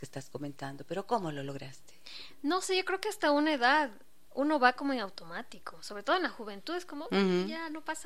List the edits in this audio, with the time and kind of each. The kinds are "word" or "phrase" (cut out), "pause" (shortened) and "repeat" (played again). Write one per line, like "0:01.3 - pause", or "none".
0:07.1 - word